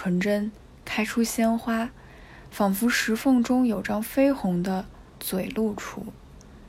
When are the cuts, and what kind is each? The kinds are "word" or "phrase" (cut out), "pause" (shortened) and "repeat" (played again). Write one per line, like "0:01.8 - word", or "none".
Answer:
0:05.1 - pause